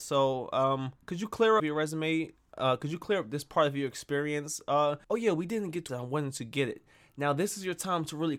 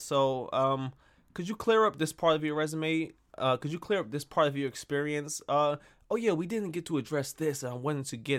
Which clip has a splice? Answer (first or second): first